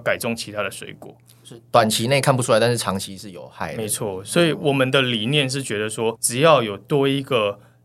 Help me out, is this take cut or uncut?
cut